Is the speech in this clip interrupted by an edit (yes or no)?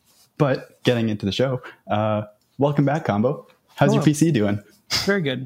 no